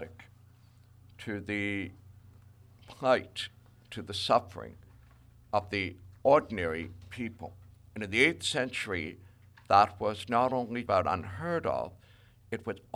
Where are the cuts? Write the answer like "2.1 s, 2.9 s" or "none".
10.9 s